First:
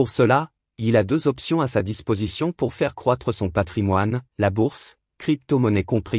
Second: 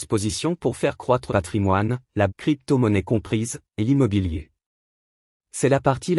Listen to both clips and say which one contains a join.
second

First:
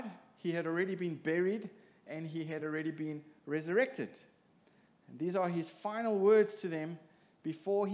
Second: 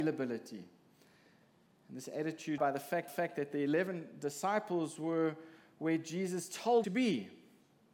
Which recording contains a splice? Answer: second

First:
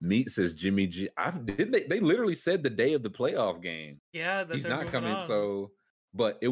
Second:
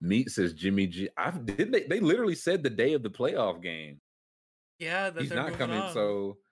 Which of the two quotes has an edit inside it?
first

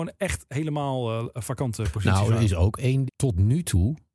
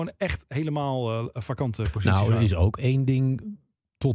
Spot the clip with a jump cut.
first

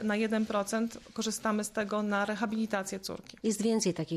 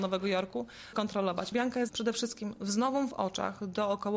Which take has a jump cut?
second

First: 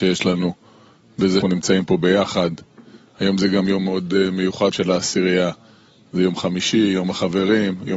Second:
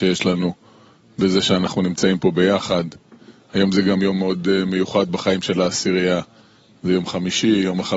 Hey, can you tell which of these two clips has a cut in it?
first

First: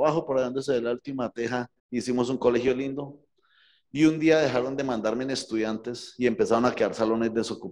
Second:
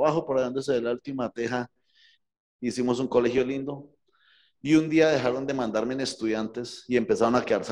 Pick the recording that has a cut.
first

